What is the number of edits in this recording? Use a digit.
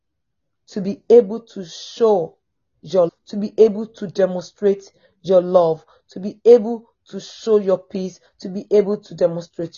1